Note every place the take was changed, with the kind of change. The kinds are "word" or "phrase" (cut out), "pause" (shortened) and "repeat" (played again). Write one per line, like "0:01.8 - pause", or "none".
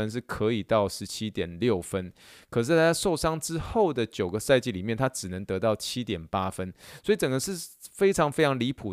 none